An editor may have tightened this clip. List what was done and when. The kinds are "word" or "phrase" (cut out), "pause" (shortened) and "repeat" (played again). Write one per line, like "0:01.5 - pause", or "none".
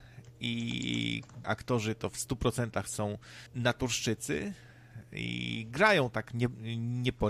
0:01.4 - word
0:03.5 - pause